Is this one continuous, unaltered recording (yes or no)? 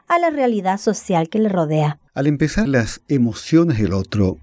no